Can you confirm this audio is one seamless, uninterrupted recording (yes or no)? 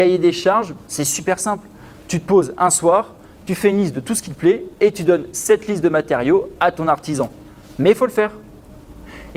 yes